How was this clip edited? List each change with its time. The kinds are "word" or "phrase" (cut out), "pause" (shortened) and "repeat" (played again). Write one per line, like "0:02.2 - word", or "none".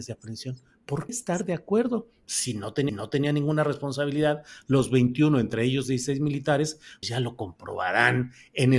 0:01.1 - word
0:02.9 - repeat
0:07.0 - word